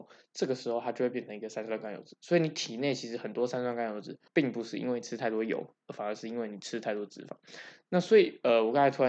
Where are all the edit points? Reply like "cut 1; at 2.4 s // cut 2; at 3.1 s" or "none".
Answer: cut 1; at 4.3 s